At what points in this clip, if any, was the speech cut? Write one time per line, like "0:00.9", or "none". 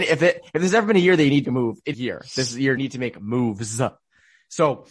0:01.4
0:01.9
0:02.8